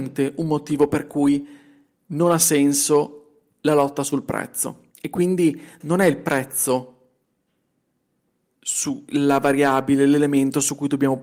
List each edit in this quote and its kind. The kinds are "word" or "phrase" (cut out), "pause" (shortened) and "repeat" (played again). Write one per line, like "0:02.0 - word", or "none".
0:04.9 - pause